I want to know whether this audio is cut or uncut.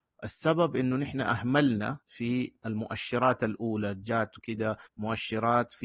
cut